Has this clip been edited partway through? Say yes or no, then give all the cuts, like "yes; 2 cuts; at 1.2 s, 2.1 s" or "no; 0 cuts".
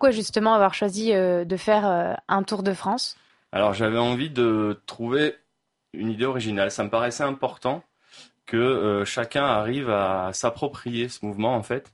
no; 0 cuts